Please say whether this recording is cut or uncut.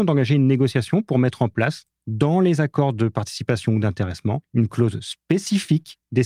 uncut